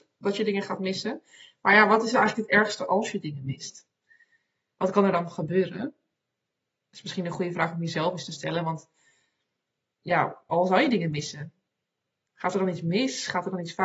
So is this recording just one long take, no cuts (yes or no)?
yes